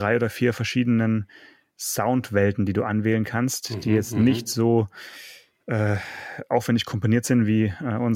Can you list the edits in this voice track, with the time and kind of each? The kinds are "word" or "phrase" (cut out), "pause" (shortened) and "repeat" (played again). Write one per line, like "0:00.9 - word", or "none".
none